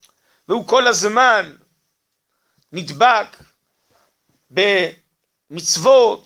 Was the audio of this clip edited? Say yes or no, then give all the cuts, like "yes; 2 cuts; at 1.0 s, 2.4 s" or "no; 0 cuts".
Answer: no; 0 cuts